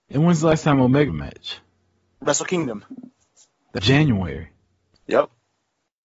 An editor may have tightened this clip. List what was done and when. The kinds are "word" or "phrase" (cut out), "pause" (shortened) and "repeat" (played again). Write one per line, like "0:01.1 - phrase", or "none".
0:01.1 - word
0:03.8 - word

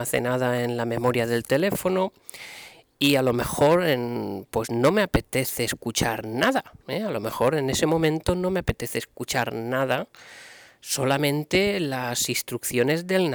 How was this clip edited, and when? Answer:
none

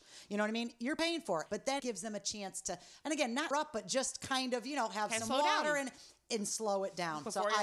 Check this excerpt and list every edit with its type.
0:01.8 - word
0:03.5 - word

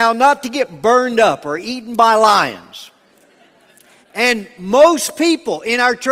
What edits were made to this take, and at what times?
none

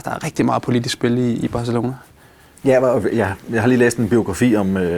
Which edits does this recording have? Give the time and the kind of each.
none

